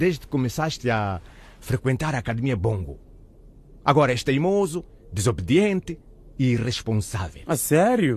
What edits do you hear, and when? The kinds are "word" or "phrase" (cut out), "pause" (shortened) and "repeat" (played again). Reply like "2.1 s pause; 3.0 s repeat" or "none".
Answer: none